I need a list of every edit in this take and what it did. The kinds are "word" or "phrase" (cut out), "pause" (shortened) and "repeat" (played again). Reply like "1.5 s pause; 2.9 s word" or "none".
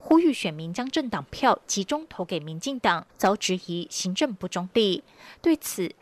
3.1 s pause

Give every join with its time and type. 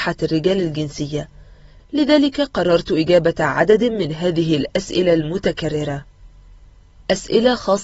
none

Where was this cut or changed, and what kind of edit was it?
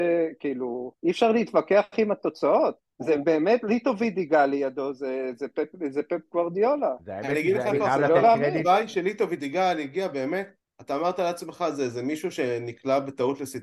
1.0 s pause; 2.9 s pause; 10.6 s pause

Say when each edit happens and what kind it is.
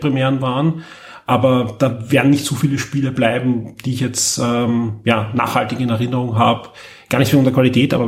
none

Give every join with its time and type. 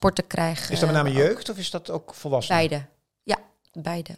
none

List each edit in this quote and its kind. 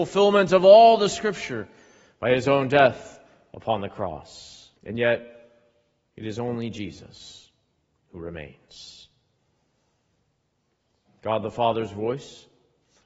4.8 s pause

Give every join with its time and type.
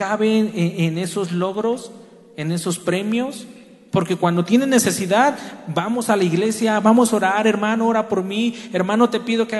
none

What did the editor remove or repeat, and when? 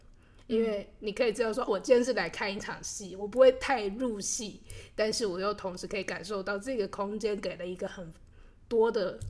1.7 s word

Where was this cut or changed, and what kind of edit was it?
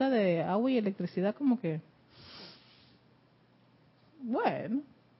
none

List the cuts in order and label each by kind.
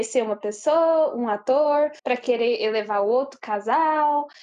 2.0 s pause

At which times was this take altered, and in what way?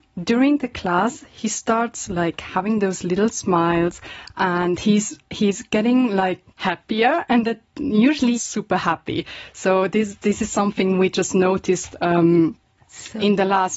6.5 s pause; 8.3 s phrase

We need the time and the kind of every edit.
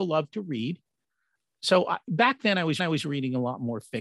2.8 s repeat

